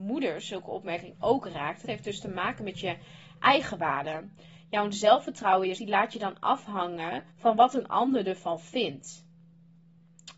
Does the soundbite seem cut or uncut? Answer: cut